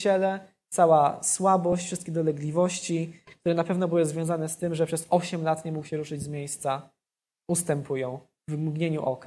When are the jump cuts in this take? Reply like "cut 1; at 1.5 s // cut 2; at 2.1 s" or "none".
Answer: none